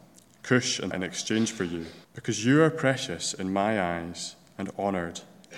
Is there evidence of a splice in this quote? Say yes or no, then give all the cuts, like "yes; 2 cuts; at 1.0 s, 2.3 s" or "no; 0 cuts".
yes; 2 cuts; at 0.9 s, 2.0 s